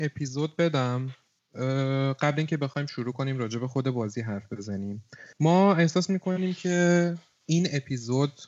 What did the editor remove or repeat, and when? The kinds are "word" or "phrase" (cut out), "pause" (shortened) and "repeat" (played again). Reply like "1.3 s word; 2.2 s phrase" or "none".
5.3 s pause